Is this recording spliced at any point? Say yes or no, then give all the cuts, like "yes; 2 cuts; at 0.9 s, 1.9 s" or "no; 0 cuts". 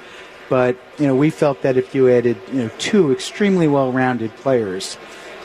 yes; 1 cut; at 0.9 s